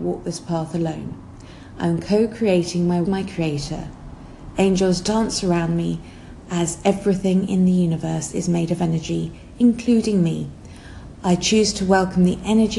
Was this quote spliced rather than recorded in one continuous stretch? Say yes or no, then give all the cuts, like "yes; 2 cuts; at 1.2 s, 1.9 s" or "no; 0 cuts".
yes; 1 cut; at 3.0 s